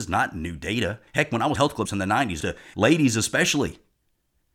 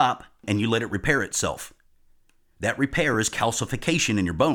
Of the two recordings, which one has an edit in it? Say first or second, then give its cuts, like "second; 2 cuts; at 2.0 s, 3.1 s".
first; 5 cuts; at 1.1 s, 1.5 s, 1.8 s, 2.4 s, 2.7 s